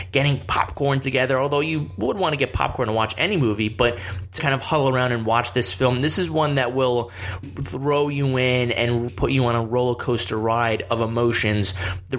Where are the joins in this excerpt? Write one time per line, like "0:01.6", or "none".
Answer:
0:04.4
0:07.4
0:09.1

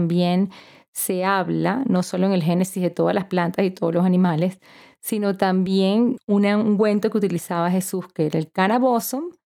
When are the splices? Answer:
0:06.2

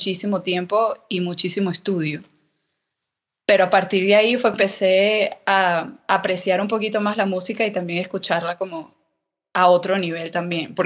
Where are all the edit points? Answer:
0:04.5

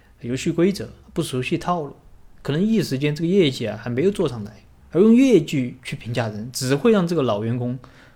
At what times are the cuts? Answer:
0:01.0
0:04.8

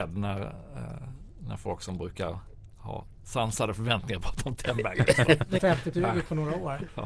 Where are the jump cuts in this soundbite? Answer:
0:04.2
0:05.6
0:05.9

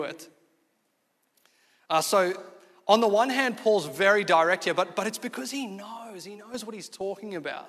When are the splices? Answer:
none

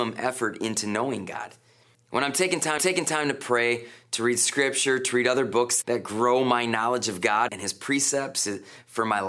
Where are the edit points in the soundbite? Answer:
0:01.9
0:02.8
0:05.8
0:07.5

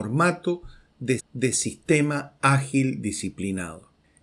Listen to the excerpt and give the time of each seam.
0:01.2

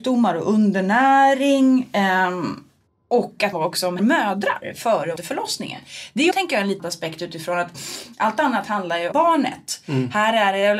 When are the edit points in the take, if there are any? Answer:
0:02.9
0:03.5
0:04.0
0:05.2
0:06.3
0:06.8
0:09.1

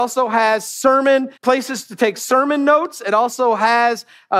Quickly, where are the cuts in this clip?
0:01.4

